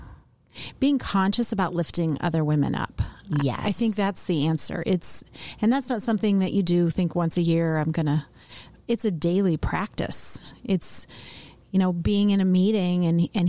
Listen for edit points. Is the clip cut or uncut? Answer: uncut